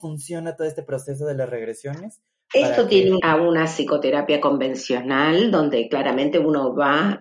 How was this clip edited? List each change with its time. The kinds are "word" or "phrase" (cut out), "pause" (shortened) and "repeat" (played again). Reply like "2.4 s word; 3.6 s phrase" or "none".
3.2 s phrase